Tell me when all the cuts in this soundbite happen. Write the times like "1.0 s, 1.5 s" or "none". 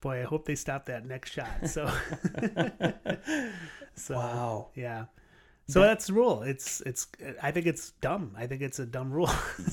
none